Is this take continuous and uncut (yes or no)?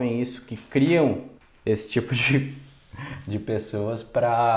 no